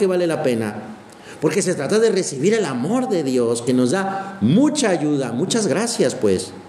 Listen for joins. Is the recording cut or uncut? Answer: uncut